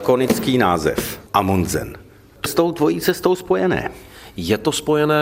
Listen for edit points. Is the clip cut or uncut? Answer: cut